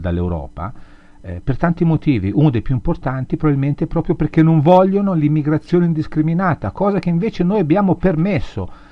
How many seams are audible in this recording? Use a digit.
0